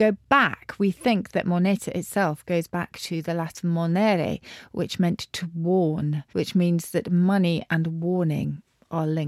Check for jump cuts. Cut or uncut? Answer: cut